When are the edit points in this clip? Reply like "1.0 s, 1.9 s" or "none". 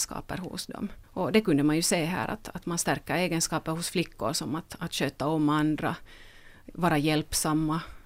1.0 s